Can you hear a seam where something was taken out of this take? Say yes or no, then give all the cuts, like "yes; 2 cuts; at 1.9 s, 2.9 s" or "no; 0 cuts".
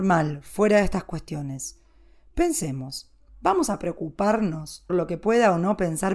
yes; 1 cut; at 4.9 s